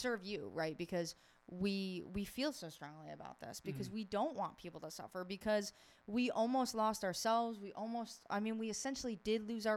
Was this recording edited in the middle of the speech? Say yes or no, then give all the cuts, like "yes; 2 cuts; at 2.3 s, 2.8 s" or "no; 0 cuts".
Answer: no; 0 cuts